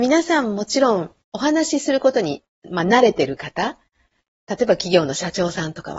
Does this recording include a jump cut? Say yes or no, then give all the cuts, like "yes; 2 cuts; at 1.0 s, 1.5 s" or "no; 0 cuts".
yes; 1 cut; at 1.2 s